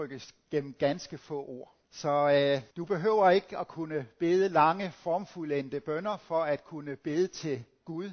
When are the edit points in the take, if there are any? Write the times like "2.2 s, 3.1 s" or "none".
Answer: 1.8 s, 2.7 s